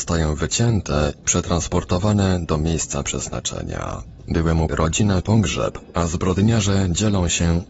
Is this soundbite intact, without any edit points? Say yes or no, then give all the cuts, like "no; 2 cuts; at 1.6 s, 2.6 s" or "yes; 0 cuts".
no; 3 cuts; at 1.2 s, 4.7 s, 5.2 s